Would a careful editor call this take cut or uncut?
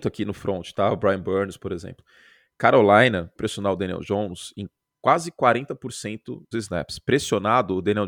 cut